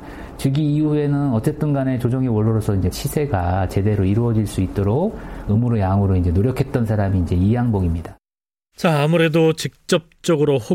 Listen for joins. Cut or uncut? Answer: cut